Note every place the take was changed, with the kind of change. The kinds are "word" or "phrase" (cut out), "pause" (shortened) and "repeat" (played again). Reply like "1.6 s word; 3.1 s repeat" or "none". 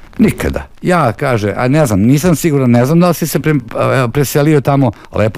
none